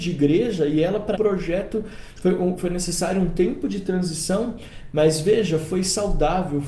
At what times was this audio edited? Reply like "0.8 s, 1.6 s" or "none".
1.1 s, 2.6 s

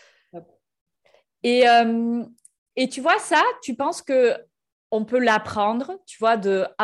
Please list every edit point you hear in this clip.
none

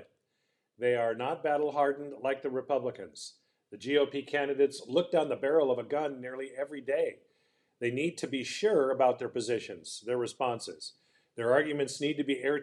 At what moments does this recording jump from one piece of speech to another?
none

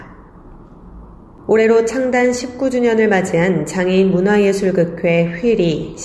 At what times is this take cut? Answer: none

